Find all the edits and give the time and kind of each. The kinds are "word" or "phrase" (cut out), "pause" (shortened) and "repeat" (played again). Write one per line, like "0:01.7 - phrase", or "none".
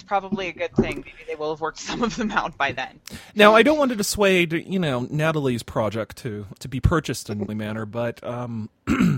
0:06.6 - word
0:07.5 - phrase